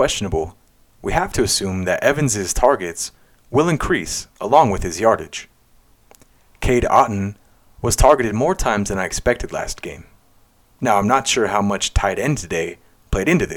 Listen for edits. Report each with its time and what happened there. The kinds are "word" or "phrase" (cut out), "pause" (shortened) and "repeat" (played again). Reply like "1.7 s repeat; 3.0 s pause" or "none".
none